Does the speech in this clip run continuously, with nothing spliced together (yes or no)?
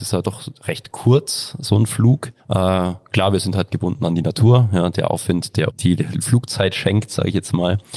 no